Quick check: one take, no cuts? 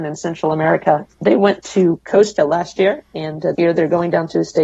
no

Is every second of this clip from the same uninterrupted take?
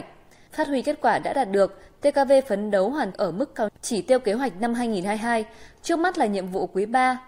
no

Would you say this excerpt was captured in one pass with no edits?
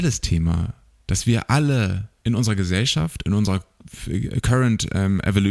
yes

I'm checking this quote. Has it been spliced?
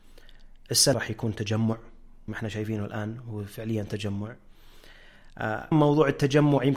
yes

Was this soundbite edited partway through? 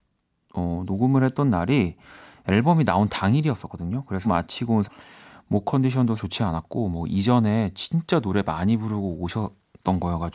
yes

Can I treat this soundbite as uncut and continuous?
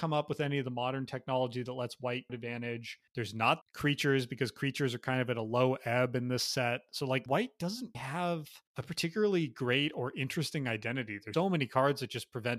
no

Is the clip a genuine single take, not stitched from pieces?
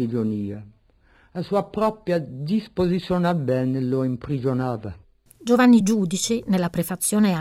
yes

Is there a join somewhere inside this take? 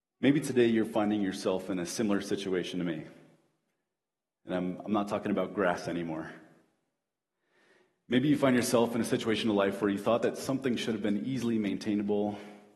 no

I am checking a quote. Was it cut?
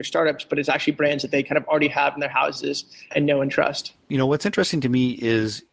yes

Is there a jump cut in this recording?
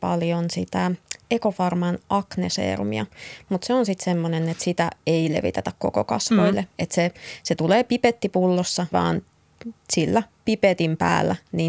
yes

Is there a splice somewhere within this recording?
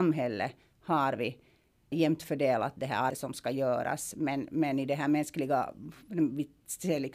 yes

